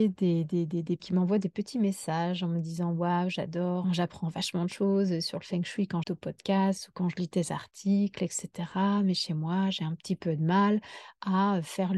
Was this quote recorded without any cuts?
no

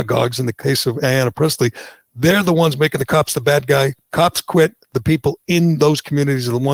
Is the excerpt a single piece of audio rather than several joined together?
yes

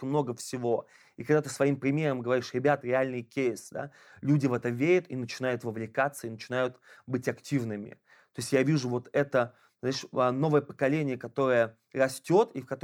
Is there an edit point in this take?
yes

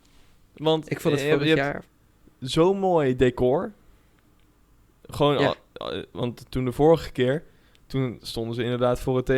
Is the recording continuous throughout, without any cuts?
yes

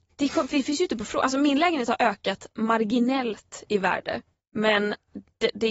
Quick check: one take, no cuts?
no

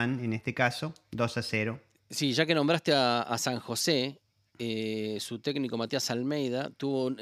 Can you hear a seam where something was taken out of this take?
no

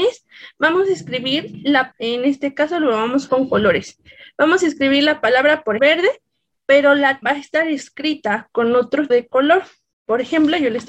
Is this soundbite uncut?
no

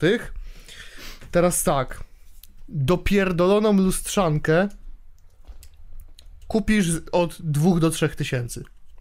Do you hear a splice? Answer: no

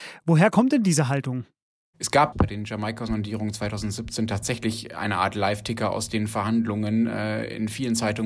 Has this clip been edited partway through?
no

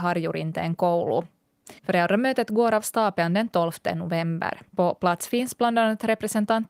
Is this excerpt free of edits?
no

